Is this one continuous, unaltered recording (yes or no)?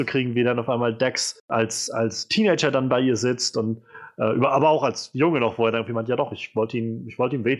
no